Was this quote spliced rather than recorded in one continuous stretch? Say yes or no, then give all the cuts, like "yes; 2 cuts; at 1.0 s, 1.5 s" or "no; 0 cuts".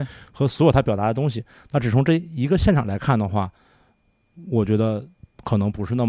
no; 0 cuts